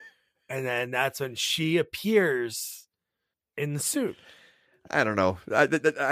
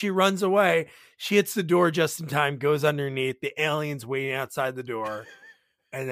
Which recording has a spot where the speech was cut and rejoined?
first; 1 cut; at 3.3 s

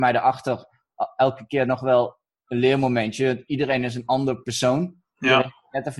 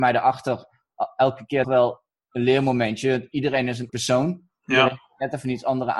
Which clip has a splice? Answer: second; 2 cuts; at 1.6 s, 3.9 s

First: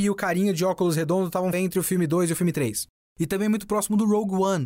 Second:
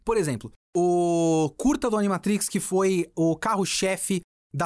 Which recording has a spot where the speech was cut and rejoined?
first; 1 cut; at 1.5 s

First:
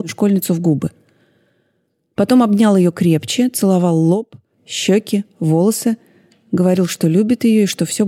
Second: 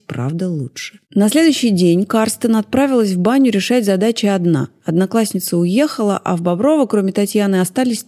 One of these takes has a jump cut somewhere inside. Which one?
second; 1 cut; at 1.0 s

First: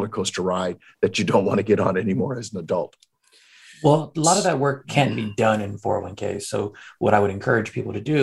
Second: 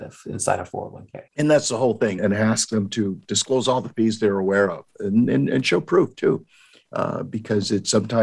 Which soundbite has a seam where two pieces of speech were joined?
second; 2 cuts; at 1.3 s, 2.2 s

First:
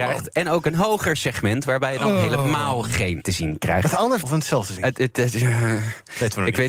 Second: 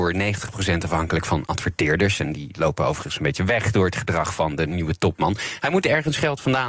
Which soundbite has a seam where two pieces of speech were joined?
first; 2 cuts; at 3.2 s, 4.2 s

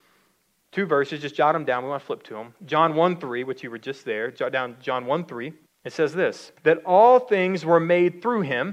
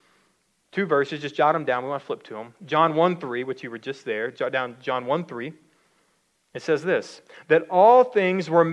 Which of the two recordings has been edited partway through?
first; 2 cuts; at 5.7 s, 6.6 s

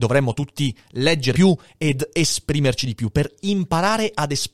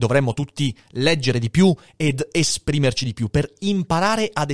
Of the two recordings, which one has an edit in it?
first; 1 cut; at 1.3 s

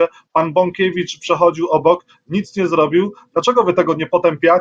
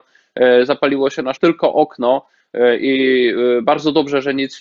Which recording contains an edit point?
second; 1 cut; at 1.4 s

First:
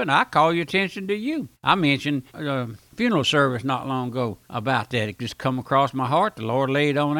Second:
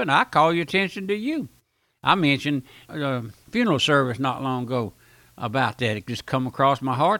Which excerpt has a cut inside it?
first; 3 cuts; at 1.5 s, 2.3 s, 4.4 s

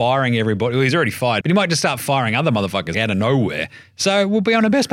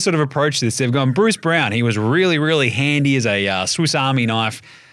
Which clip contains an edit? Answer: first; 2 cuts; at 1.4 s, 2.9 s

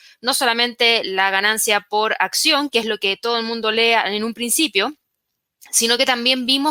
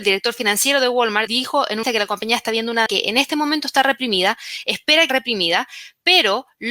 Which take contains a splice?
second; 4 cuts; at 1.3 s, 1.8 s, 2.9 s, 5.1 s

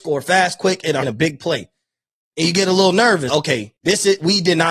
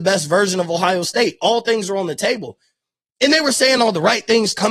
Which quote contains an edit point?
first; 3 cuts; at 1.0 s, 3.3 s, 3.8 s

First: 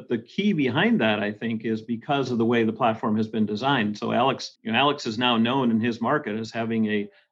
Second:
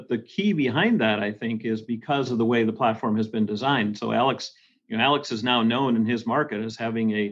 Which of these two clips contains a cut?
first; 1 cut; at 4.6 s

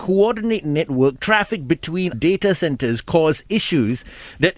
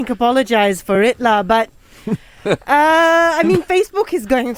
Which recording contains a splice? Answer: first; 1 cut; at 2.1 s

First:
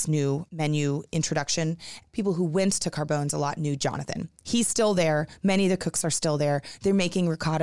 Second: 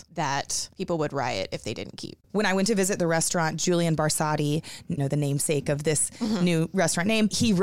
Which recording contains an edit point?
second; 1 cut; at 5.0 s

